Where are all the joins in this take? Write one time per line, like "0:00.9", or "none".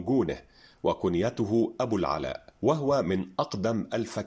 0:02.5